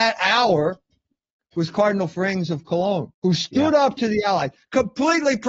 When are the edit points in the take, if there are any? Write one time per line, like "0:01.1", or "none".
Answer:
0:03.1